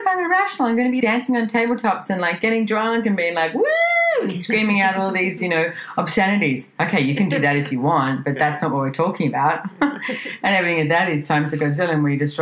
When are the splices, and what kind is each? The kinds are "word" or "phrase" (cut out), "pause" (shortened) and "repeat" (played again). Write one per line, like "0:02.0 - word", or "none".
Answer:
0:01.0 - word